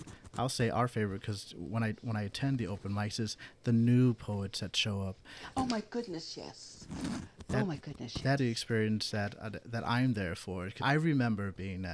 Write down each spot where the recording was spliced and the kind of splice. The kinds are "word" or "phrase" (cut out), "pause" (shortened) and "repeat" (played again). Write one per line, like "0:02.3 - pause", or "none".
0:08.4 - word
0:10.8 - word